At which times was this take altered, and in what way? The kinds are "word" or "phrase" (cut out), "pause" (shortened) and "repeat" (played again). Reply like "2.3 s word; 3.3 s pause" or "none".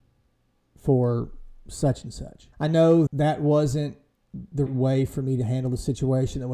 2.5 s pause; 3.1 s word; 4.7 s word